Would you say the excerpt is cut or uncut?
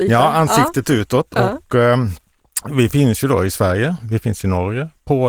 uncut